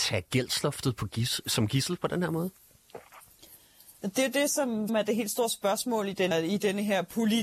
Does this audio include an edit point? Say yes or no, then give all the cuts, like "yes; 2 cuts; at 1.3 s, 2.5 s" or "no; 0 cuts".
yes; 3 cuts; at 4.0 s, 4.9 s, 6.3 s